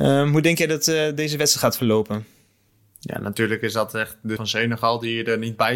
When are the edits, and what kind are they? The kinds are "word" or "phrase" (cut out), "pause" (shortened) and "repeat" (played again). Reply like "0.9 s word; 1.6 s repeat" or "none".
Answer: 4.4 s word